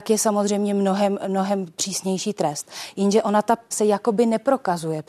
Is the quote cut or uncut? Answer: cut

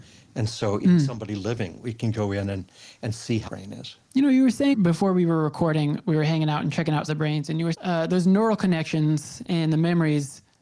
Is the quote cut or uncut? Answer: cut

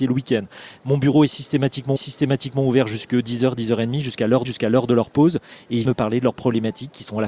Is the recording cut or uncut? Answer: cut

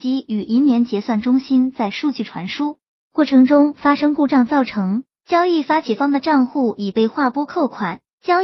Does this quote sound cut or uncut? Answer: uncut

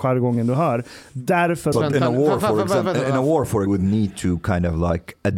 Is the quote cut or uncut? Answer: cut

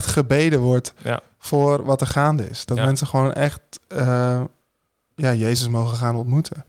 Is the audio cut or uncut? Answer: uncut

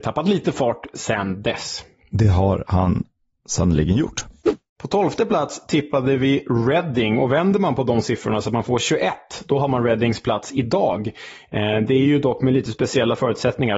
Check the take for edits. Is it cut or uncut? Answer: uncut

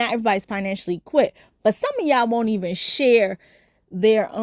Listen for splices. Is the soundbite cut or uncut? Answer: uncut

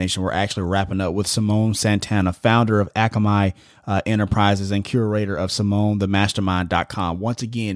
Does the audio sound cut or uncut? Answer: uncut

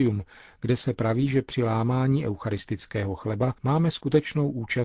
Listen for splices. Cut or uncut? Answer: cut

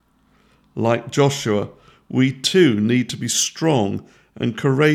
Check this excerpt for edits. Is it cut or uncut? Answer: uncut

